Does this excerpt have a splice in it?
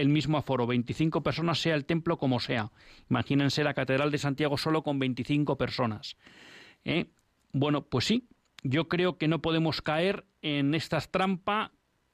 no; 0 cuts

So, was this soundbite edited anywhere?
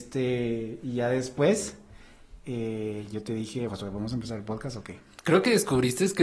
yes; 1 cut; at 3.7 s

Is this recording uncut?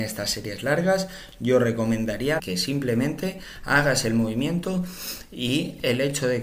no; 1 cut; at 2.4 s

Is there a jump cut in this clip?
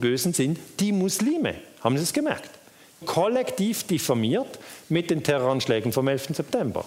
yes; 1 cut; at 3.0 s

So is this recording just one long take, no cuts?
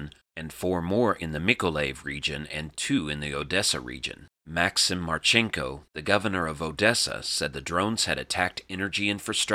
yes; 0 cuts

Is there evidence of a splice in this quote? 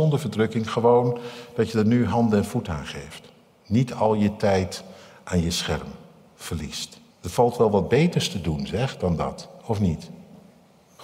yes; 1 cut; at 7.1 s

